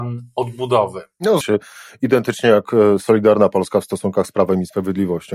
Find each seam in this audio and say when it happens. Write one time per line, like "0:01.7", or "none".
0:01.4